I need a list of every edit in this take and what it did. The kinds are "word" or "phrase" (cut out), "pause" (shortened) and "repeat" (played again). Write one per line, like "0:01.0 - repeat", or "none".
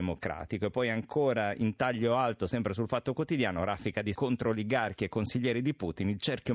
0:04.1 - word